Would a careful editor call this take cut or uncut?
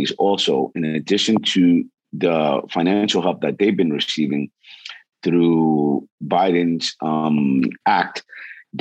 uncut